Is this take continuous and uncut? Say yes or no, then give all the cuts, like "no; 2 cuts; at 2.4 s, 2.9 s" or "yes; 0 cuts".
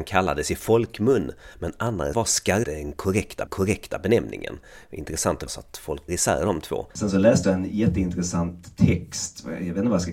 no; 7 cuts; at 2.1 s, 2.6 s, 3.5 s, 5.5 s, 6.1 s, 6.9 s, 7.4 s